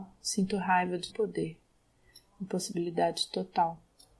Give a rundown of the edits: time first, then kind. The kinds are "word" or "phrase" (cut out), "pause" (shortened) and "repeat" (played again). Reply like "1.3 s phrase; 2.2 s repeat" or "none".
1.1 s word

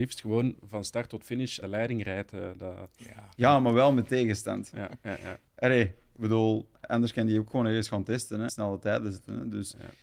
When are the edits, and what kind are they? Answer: 1.6 s word; 5.5 s pause; 6.7 s pause; 8.5 s word

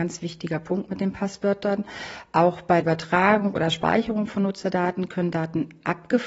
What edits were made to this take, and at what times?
2.8 s word

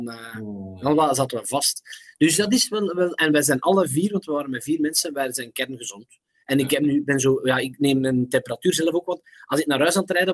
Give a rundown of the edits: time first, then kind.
none

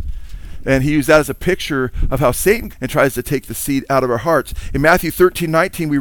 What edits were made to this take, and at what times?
2.7 s word

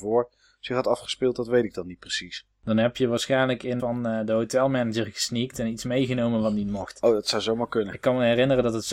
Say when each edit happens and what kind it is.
3.8 s phrase

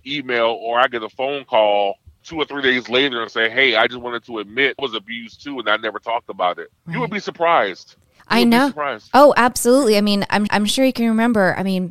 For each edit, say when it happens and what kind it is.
2.2 s word; 4.8 s phrase; 6.8 s pause; 8.2 s pause; 10.5 s repeat

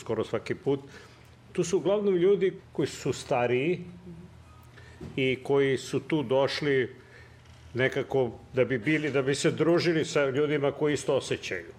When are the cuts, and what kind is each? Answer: 2.6 s word

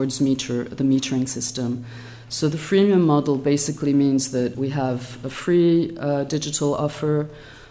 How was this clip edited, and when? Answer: 4.5 s word

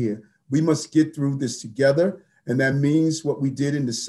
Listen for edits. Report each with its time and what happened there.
none

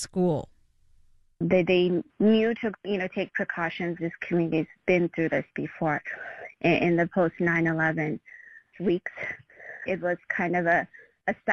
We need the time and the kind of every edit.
2.1 s pause; 4.0 s word; 4.8 s pause; 8.7 s word; 9.9 s word

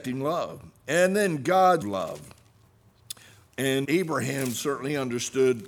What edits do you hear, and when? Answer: 1.8 s phrase; 3.8 s word

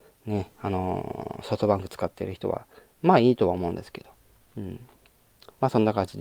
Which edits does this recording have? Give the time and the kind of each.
none

